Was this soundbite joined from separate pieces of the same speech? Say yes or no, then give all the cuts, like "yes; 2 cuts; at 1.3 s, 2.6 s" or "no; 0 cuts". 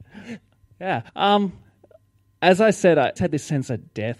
yes; 2 cuts; at 1.1 s, 3.2 s